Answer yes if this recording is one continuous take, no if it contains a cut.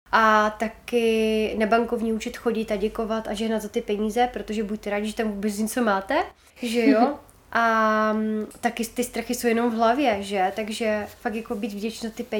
no